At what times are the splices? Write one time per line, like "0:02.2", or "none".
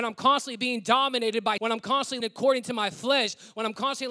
0:01.6
0:02.2